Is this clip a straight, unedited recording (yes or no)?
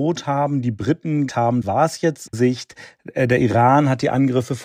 no